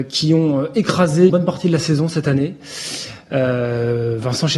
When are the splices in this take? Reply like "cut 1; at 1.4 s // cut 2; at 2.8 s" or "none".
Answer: cut 1; at 1.3 s